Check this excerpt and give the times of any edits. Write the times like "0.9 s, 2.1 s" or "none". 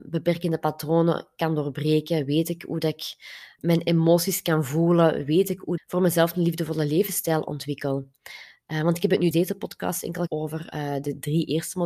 5.8 s, 9.3 s, 10.3 s